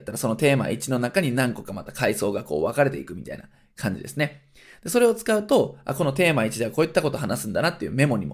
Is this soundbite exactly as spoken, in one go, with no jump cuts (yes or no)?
yes